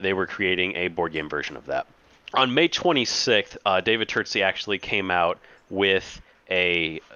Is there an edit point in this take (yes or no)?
no